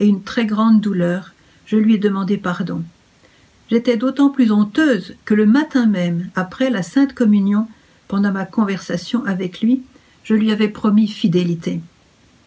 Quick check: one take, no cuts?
yes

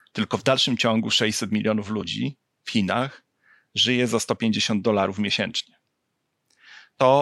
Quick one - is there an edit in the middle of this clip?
no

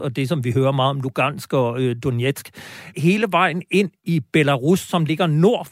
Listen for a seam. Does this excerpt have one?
yes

